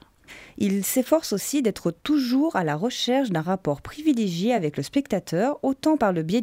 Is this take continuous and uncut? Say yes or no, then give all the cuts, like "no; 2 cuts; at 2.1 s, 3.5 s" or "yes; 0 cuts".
yes; 0 cuts